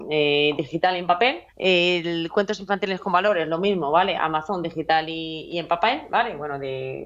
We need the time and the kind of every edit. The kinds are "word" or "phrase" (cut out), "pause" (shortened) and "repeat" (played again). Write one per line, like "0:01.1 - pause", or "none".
0:01.5 - pause